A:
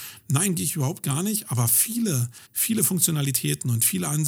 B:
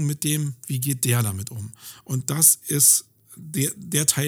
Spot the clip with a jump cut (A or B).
A